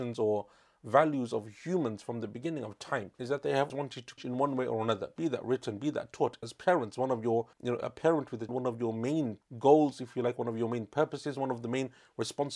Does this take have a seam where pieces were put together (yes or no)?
yes